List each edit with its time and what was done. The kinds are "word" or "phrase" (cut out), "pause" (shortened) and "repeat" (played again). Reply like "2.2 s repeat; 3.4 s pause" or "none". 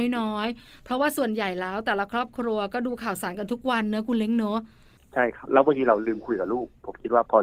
none